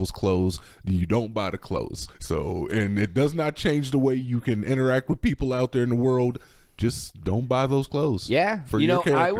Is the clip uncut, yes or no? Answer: no